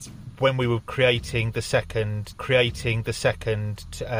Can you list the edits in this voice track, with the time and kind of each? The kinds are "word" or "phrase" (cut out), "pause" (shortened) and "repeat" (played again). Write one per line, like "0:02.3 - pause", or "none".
0:02.3 - repeat